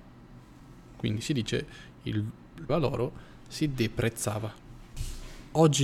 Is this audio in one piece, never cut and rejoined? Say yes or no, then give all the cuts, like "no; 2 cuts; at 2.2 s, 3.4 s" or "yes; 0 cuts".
no; 1 cut; at 2.7 s